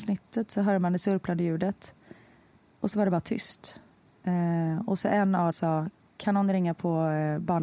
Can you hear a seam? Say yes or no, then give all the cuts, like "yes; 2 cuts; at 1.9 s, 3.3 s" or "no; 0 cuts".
yes; 2 cuts; at 4.0 s, 5.5 s